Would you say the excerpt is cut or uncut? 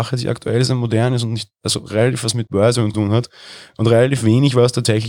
cut